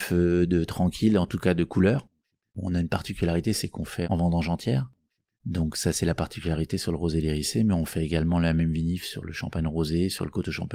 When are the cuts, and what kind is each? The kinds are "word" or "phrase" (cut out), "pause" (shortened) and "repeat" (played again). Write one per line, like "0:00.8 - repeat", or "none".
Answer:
none